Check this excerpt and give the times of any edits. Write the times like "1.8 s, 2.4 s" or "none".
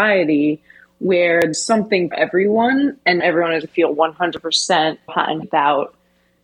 1.5 s, 2.1 s, 3.2 s, 3.7 s, 5.1 s, 5.4 s

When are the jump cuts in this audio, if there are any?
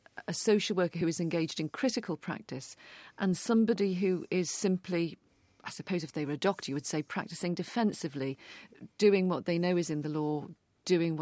none

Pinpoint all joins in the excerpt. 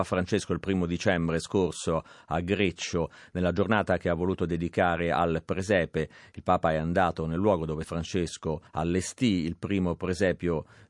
7.8 s, 8.7 s

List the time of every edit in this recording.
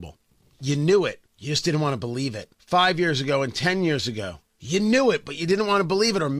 1.3 s, 2.5 s, 4.5 s

